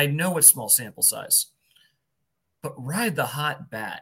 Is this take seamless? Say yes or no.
yes